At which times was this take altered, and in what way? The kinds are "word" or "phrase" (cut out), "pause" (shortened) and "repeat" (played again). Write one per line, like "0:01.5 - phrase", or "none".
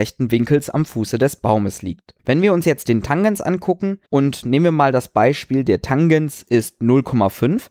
0:02.2 - pause
0:04.1 - pause